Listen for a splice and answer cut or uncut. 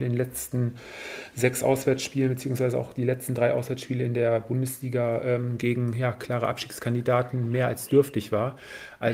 uncut